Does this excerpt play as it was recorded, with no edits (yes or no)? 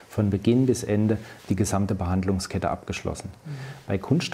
no